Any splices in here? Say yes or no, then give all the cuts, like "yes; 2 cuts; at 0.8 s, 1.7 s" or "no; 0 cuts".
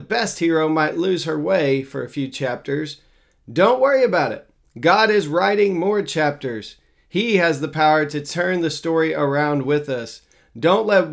no; 0 cuts